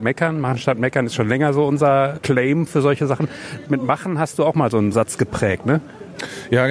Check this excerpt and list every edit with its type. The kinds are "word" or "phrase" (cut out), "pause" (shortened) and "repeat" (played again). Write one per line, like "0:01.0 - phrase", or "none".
none